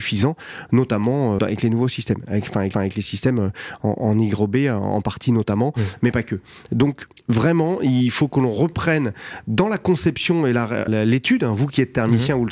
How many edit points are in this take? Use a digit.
4